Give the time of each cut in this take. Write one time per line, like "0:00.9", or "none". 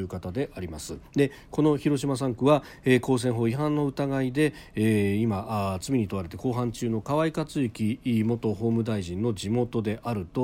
0:01.1